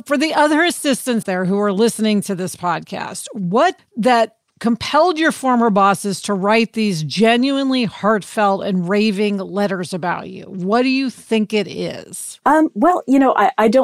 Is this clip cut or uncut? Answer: cut